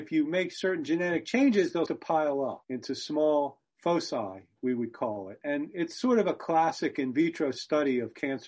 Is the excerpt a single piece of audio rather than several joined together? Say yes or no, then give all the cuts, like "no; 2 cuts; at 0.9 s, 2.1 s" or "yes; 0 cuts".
no; 1 cut; at 1.9 s